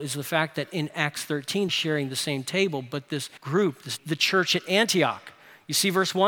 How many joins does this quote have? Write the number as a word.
three